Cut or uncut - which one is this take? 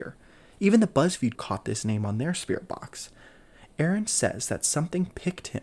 cut